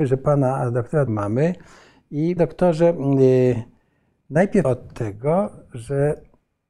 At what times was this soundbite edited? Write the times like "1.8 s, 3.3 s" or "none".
1.1 s, 2.4 s, 4.6 s

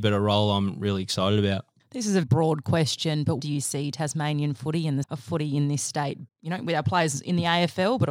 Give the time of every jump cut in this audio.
2.2 s, 3.4 s, 5.0 s, 6.3 s

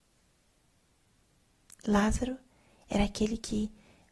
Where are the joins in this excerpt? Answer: none

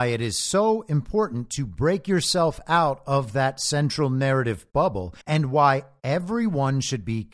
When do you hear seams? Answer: 5.2 s

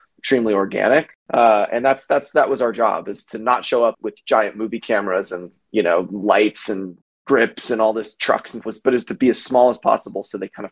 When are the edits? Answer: 1.2 s, 3.9 s, 8.6 s

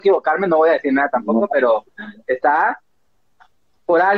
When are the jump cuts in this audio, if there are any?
none

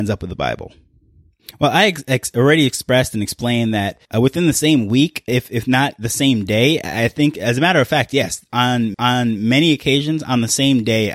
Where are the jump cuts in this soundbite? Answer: 4.0 s, 5.3 s, 8.9 s

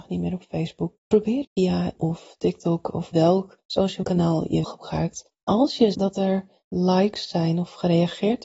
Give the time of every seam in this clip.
1.0 s, 1.4 s, 2.0 s, 3.1 s, 4.0 s, 4.6 s, 5.9 s

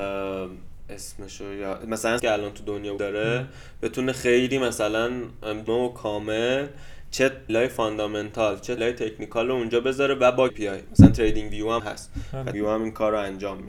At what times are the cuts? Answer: 2.2 s, 3.0 s, 5.7 s, 7.5 s, 8.8 s, 10.5 s, 11.8 s, 12.5 s

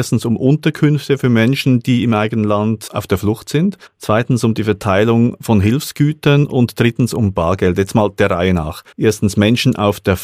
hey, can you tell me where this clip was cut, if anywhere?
3.9 s, 8.9 s

